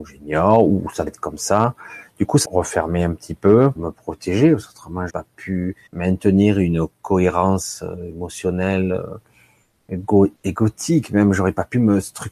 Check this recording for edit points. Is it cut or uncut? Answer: cut